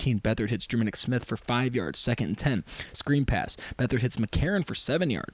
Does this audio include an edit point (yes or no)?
no